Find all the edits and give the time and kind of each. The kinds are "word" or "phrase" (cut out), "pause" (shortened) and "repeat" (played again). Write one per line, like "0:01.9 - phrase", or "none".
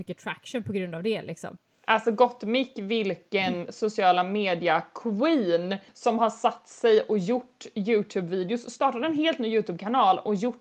0:05.9 - pause